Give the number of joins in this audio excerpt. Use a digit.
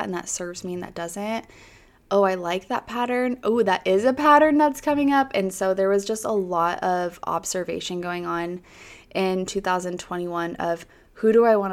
0